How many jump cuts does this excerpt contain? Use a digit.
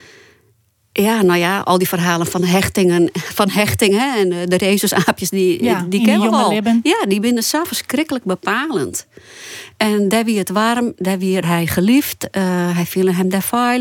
1